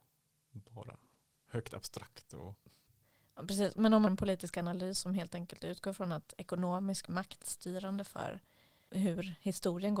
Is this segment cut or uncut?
cut